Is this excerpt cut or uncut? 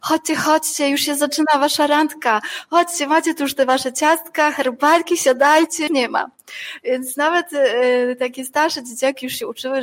cut